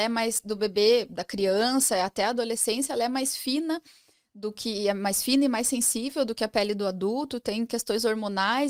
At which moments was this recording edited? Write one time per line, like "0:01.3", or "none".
none